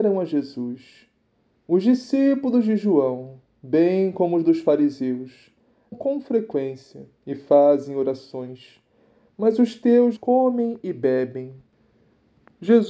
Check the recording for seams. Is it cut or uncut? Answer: cut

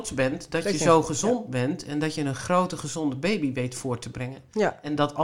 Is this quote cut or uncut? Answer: uncut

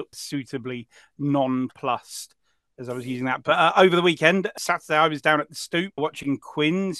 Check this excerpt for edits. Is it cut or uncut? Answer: uncut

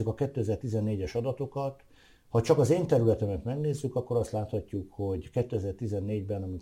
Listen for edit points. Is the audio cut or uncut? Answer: uncut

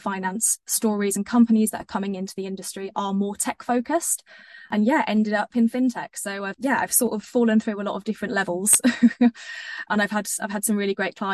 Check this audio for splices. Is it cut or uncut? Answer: uncut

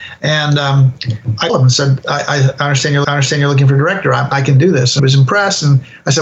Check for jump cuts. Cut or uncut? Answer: cut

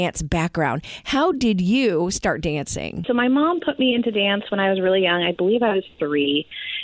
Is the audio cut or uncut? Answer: uncut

